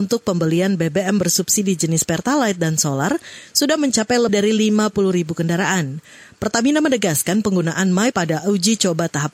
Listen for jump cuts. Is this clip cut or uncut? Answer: cut